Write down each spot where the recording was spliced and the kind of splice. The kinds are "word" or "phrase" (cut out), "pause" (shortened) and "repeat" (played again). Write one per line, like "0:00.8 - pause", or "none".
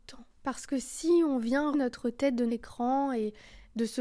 0:01.7 - word
0:02.5 - word